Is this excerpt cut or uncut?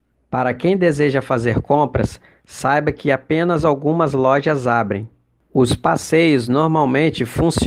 uncut